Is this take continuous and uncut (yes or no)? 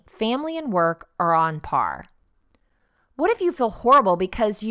yes